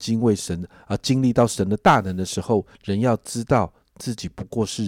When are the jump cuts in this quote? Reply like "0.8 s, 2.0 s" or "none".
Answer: 2.7 s

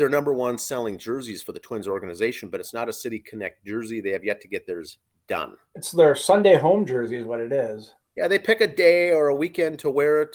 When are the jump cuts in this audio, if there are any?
none

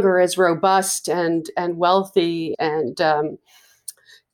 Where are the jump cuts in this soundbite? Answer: 2.5 s

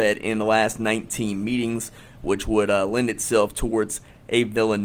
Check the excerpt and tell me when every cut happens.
none

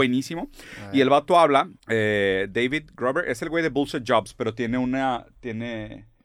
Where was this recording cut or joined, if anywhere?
1.8 s

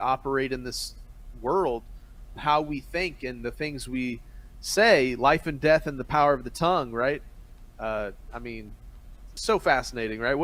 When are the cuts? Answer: 2.4 s, 9.4 s

